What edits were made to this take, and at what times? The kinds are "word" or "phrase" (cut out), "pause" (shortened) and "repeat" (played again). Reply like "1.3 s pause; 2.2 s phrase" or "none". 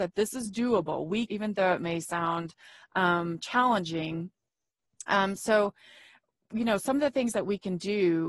1.3 s phrase